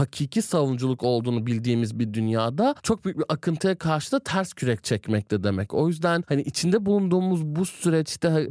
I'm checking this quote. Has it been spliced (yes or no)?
yes